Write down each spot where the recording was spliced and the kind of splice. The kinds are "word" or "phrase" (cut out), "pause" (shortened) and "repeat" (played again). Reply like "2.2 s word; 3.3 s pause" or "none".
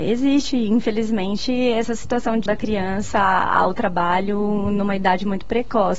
2.5 s word